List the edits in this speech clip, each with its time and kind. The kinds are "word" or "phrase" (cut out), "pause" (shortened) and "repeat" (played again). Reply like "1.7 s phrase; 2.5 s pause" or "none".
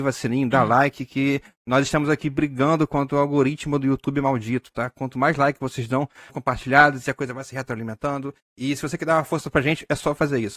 6.3 s phrase